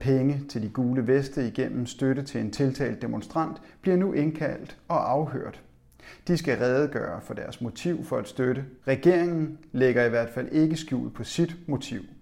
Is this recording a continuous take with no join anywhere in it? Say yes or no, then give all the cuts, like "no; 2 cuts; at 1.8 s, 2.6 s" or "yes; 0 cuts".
no; 1 cut; at 8.8 s